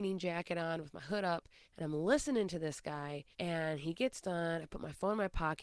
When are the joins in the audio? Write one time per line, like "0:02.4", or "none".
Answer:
0:01.6
0:03.3